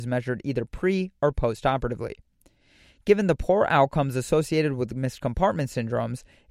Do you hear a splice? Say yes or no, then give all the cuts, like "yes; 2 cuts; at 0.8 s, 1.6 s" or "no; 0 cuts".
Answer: no; 0 cuts